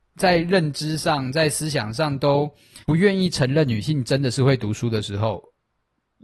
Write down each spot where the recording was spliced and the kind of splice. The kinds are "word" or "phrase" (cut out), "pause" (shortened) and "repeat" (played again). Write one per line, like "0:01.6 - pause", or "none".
0:02.8 - pause